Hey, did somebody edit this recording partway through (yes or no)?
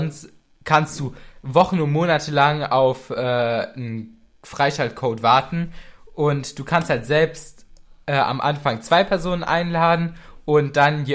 no